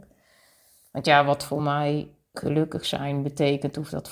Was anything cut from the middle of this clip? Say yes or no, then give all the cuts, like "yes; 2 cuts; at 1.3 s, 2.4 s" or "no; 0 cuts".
no; 0 cuts